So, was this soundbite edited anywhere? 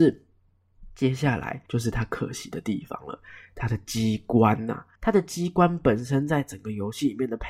yes; 2 cuts; at 1.7 s, 4.9 s

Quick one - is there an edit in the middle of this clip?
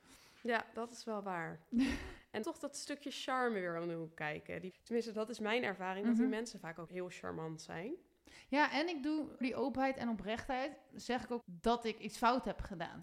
yes; 5 cuts; at 2.4 s, 4.7 s, 6.9 s, 9.4 s, 11.4 s

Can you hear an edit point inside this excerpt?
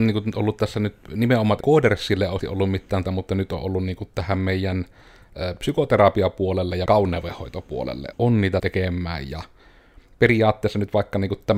yes; 6 cuts; at 1.6 s, 2.4 s, 3.0 s, 6.9 s, 8.1 s, 8.6 s

